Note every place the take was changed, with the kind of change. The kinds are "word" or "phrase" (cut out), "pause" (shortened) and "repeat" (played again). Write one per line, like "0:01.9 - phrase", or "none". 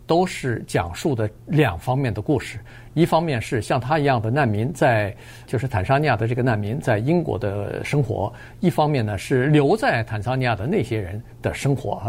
0:05.5 - word